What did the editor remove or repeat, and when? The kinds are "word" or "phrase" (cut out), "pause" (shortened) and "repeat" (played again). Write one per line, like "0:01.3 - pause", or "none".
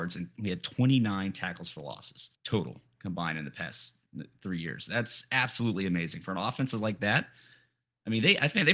0:02.3 - pause